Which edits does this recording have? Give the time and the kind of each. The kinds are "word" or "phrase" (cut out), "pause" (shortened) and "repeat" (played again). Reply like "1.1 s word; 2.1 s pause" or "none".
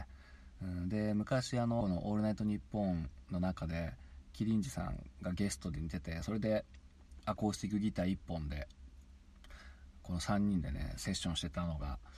1.8 s word

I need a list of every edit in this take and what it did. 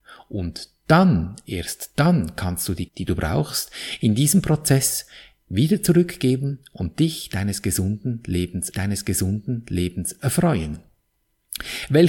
2.9 s phrase; 8.7 s repeat

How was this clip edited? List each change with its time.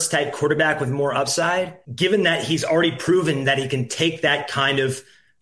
1.8 s pause

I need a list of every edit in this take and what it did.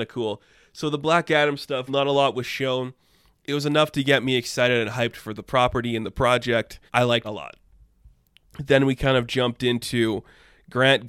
1.9 s word; 6.9 s pause; 7.2 s word

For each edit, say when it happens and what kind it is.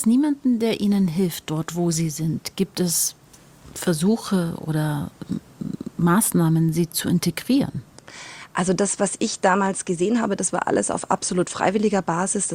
none

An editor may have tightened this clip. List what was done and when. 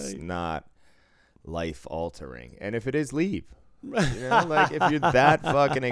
none

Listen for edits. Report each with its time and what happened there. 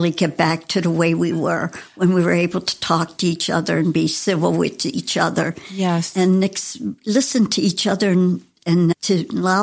none

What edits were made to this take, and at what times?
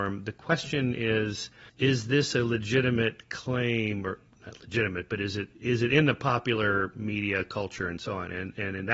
1.7 s pause

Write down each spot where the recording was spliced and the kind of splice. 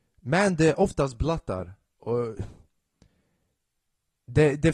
none

